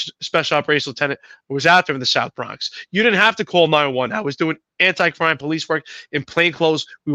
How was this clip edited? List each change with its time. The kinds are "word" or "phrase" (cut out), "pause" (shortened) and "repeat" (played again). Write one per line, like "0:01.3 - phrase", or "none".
none